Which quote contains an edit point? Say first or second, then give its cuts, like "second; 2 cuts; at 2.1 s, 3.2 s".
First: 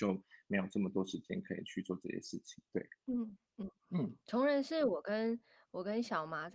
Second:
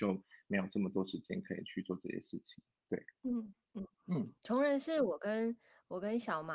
first; 1 cut; at 2.7 s